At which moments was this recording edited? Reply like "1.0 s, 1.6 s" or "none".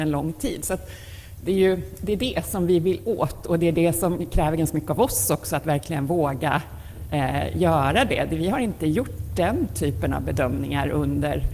none

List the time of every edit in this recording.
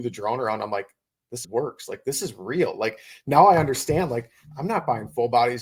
1.4 s

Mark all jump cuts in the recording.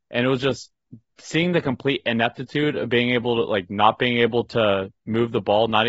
none

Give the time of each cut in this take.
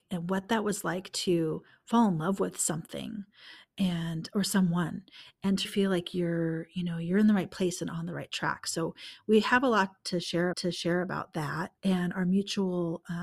5.6 s, 10.5 s, 11.8 s

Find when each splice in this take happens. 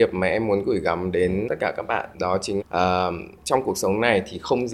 1.5 s, 2.1 s, 2.6 s, 3.4 s

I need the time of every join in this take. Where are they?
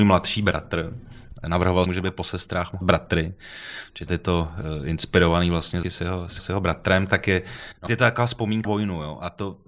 1.9 s, 2.8 s, 4.1 s, 5.8 s, 6.4 s, 7.9 s, 8.6 s

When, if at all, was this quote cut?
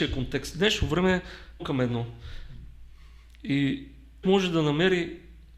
1.6 s, 4.2 s

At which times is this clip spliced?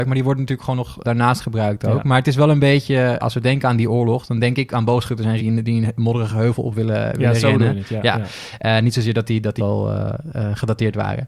1.0 s, 3.2 s, 5.4 s, 9.6 s

